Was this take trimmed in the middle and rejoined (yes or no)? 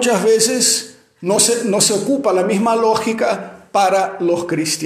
no